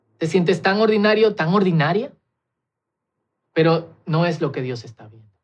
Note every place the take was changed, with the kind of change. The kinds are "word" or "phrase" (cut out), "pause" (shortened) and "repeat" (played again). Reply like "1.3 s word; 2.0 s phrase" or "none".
3.2 s pause